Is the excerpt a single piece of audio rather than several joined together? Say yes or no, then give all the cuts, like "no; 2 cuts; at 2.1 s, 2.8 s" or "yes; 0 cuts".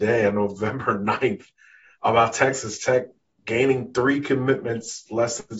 yes; 0 cuts